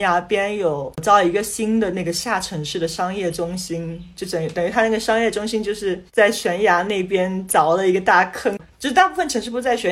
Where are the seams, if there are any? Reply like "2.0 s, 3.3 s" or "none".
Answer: 6.1 s